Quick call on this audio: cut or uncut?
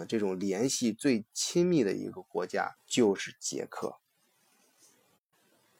cut